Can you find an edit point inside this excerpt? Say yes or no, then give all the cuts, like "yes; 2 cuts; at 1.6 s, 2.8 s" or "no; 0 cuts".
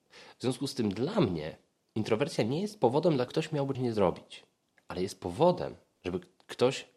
yes; 2 cuts; at 3.3 s, 3.7 s